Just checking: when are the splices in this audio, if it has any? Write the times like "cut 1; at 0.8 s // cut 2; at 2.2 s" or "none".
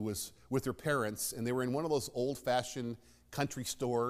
none